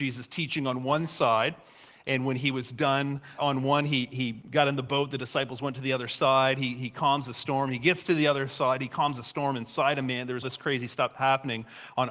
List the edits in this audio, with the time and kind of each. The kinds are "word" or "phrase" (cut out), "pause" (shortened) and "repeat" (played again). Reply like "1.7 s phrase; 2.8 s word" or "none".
3.4 s word; 10.4 s word